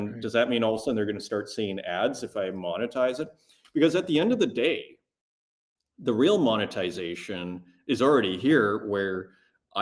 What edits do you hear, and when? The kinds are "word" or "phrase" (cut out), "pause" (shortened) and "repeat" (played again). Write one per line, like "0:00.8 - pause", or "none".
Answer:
none